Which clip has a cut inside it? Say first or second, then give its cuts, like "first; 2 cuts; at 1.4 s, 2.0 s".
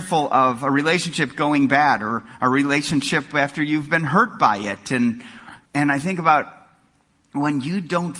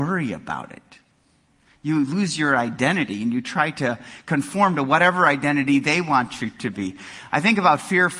first; 1 cut; at 5.7 s